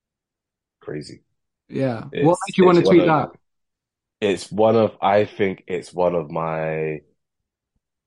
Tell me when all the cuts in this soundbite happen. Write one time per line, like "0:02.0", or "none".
none